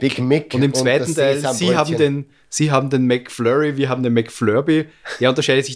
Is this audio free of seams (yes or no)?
yes